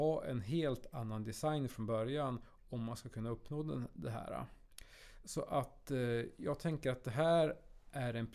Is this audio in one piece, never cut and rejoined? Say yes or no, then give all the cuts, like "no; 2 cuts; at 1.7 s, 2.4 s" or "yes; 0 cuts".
yes; 0 cuts